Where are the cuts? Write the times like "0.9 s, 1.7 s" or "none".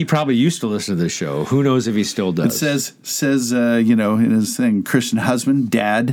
none